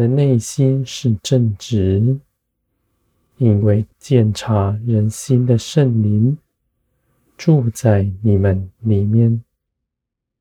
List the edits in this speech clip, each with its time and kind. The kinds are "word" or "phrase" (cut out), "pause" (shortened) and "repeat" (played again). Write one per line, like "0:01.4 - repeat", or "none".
0:03.9 - pause